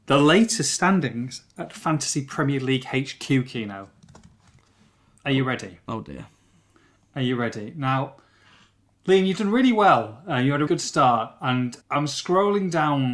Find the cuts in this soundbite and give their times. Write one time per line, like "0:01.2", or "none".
0:10.7
0:11.8